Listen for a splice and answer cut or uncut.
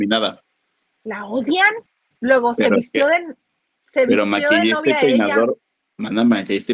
uncut